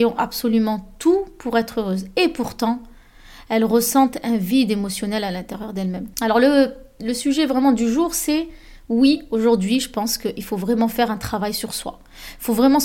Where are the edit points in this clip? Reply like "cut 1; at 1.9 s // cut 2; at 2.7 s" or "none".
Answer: cut 1; at 6.1 s